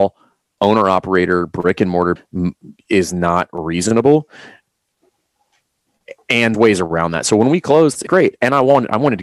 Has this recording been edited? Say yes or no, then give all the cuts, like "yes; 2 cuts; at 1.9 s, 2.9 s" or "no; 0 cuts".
yes; 3 cuts; at 2.2 s, 6.5 s, 8.1 s